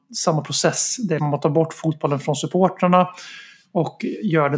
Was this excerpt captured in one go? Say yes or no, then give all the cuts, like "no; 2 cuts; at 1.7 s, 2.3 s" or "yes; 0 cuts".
no; 1 cut; at 1.2 s